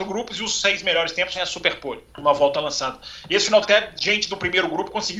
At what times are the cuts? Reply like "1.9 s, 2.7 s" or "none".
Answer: 1.3 s, 2.1 s, 3.6 s